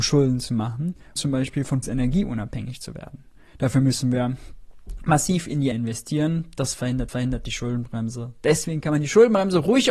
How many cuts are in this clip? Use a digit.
4